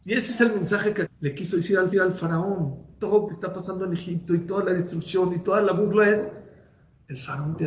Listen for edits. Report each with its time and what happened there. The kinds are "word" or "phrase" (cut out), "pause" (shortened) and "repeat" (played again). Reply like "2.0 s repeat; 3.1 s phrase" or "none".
1.1 s word; 1.9 s repeat; 3.3 s word